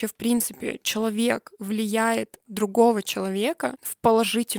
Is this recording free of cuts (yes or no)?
no